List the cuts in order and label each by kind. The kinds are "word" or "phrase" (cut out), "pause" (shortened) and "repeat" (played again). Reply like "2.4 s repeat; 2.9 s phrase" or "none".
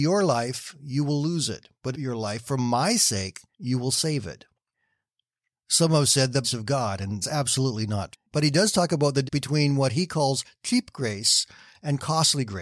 1.9 s phrase; 3.5 s pause; 6.4 s phrase; 7.2 s word; 8.1 s word; 9.2 s word